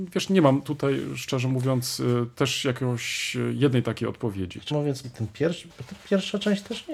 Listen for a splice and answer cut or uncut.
cut